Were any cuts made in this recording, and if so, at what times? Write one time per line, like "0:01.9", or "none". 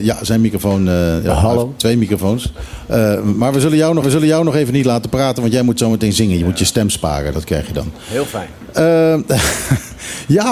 0:04.0